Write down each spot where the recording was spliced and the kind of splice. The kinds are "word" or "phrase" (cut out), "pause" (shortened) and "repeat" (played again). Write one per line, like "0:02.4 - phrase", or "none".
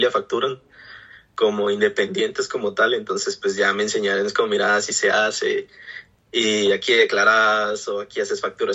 none